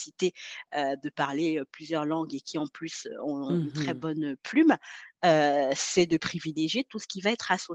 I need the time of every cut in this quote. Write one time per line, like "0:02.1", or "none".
none